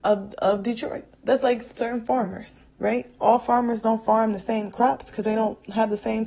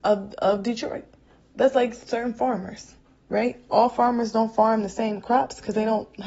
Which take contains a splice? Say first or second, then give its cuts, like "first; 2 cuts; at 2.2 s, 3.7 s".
first; 2 cuts; at 1.1 s, 2.7 s